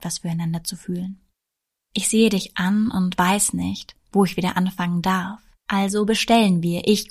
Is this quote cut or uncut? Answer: uncut